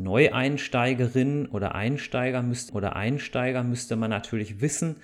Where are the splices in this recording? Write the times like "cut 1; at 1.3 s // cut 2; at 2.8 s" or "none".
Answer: cut 1; at 2.7 s